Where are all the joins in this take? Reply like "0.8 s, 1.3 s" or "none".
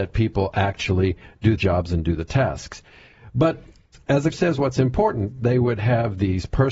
1.6 s, 4.3 s